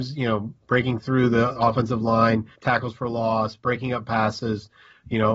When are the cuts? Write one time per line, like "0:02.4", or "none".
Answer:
0:02.5

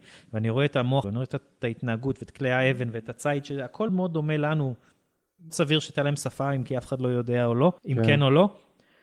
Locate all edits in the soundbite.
0:01.0
0:03.9
0:05.5
0:07.8

